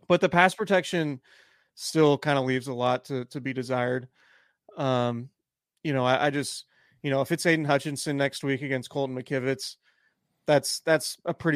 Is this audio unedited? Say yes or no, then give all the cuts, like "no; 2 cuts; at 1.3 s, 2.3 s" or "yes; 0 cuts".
yes; 0 cuts